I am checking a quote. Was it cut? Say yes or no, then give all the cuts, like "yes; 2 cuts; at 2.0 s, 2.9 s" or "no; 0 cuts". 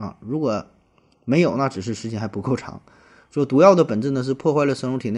no; 0 cuts